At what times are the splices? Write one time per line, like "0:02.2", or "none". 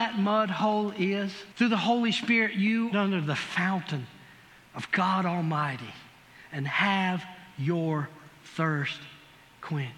0:01.5
0:02.9